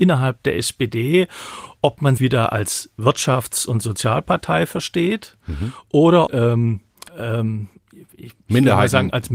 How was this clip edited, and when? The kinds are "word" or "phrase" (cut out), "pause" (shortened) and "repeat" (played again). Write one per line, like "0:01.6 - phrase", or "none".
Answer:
0:02.2 - word
0:06.3 - phrase
0:07.1 - pause